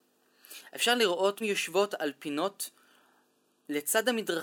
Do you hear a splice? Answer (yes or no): yes